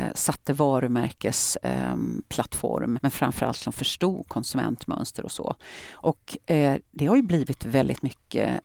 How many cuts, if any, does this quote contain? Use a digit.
3